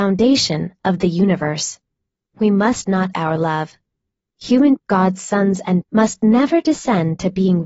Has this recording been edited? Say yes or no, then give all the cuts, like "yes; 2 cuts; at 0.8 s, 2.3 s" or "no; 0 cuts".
yes; 3 cuts; at 3.1 s, 4.8 s, 5.8 s